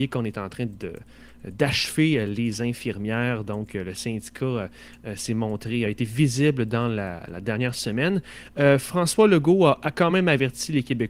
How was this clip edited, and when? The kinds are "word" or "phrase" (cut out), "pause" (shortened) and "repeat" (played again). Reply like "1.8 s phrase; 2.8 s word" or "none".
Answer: none